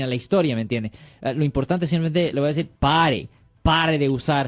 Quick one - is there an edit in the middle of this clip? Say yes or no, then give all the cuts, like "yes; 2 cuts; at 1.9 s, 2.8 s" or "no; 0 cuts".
yes; 2 cuts; at 2.3 s, 2.8 s